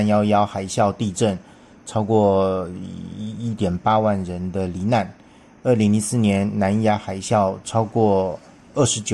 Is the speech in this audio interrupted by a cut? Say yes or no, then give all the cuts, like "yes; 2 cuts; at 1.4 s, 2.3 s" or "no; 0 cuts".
no; 0 cuts